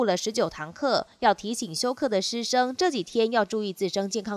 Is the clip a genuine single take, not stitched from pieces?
yes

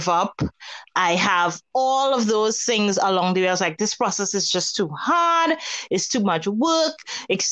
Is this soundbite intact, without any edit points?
yes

